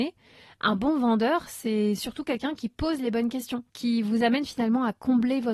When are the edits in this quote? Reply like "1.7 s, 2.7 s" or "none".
3.7 s